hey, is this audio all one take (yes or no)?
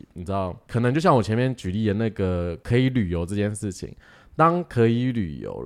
yes